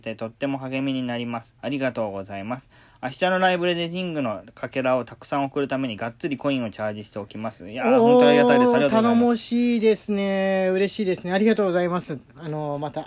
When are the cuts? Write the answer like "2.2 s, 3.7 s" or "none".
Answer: none